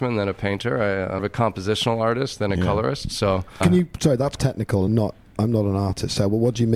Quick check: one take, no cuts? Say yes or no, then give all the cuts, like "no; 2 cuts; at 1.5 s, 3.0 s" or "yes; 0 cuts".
no; 4 cuts; at 1.2 s, 3.6 s, 4.4 s, 4.9 s